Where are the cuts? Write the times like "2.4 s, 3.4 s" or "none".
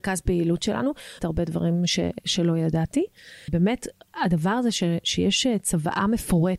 1.2 s, 3.5 s